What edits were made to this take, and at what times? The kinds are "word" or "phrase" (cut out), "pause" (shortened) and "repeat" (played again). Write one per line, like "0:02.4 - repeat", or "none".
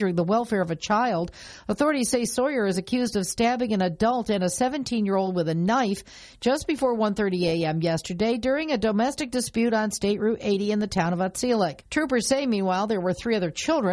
0:11.8 - pause